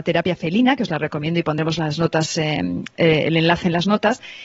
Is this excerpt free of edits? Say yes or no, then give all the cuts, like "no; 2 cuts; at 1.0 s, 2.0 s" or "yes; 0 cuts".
yes; 0 cuts